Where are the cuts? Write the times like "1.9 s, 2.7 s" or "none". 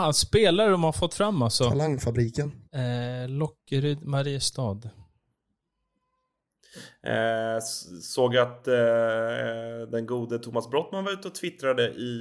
2.6 s